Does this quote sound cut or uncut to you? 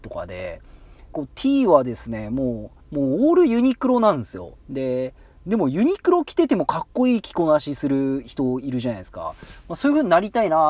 cut